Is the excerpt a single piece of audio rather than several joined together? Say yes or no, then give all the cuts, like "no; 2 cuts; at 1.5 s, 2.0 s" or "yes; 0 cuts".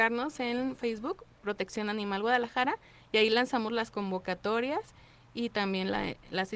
yes; 0 cuts